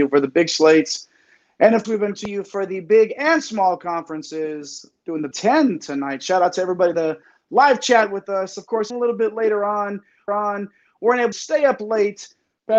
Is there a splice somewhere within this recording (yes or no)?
yes